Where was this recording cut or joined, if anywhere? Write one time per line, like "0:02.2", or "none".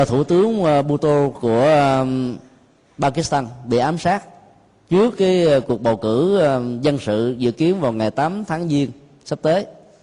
none